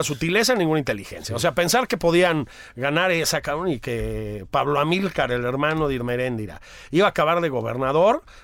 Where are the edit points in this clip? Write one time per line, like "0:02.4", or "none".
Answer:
none